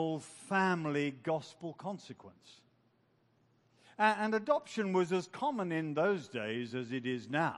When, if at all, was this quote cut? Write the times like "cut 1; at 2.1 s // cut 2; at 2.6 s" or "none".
none